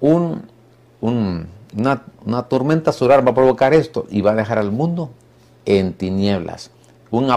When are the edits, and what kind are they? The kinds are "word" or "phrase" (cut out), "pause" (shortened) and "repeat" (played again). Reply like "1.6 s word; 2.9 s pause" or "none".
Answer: none